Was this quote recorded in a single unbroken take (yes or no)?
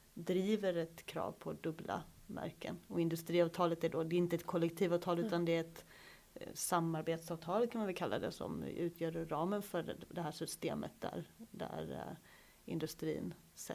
yes